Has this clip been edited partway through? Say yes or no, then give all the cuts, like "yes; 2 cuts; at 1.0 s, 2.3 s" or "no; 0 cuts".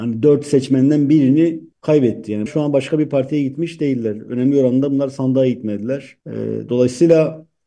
yes; 3 cuts; at 1.7 s, 2.5 s, 6.2 s